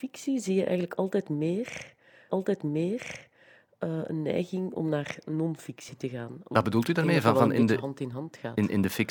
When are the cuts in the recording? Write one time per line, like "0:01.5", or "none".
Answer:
0:02.3